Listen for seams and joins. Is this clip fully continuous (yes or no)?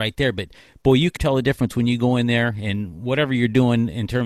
no